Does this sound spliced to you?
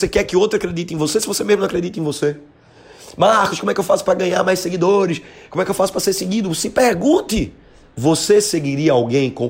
no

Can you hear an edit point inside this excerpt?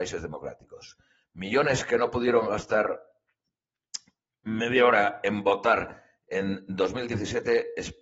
no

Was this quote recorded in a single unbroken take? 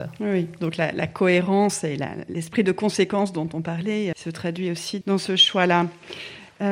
no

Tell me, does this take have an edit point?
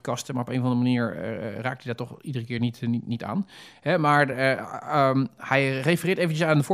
no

